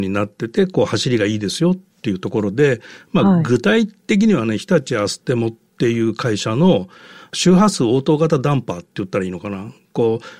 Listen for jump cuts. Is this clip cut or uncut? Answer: uncut